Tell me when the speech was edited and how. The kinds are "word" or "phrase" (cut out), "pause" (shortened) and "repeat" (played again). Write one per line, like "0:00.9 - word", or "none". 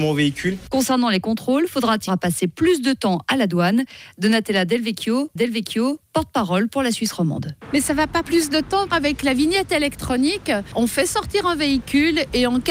0:02.1 - word
0:05.4 - repeat
0:08.2 - word